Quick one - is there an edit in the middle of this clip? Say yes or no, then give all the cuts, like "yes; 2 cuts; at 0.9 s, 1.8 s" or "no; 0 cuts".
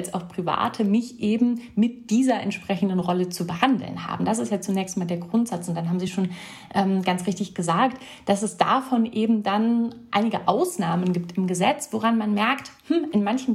no; 0 cuts